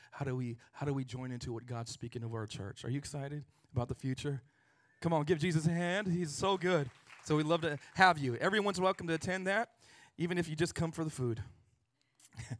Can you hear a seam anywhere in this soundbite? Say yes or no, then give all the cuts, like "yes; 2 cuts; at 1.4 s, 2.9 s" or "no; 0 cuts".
no; 0 cuts